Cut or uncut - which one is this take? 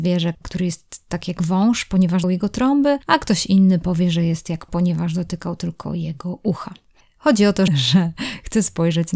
cut